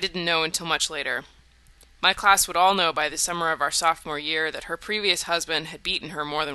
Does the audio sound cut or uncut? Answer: uncut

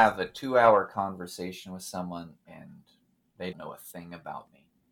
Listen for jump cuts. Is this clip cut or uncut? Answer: cut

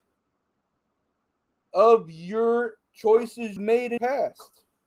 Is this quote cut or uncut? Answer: cut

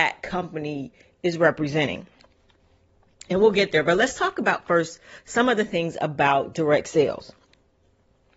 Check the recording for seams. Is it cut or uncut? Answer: uncut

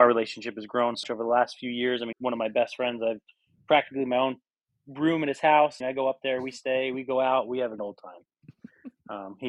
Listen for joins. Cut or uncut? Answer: cut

